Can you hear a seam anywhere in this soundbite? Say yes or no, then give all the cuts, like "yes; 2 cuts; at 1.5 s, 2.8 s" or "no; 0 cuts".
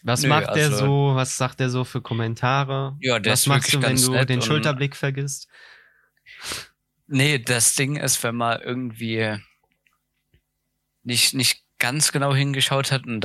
no; 0 cuts